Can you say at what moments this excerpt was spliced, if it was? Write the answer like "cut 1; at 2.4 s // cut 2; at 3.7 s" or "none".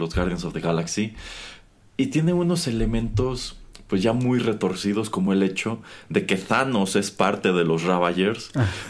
none